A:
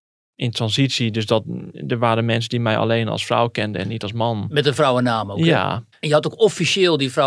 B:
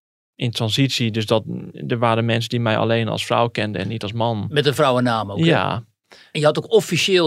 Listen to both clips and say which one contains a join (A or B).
A